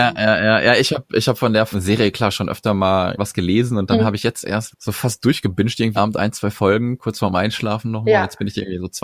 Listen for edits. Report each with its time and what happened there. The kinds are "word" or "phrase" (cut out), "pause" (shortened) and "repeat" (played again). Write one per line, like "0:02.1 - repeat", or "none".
0:01.7 - word
0:03.2 - phrase
0:04.7 - word
0:06.0 - word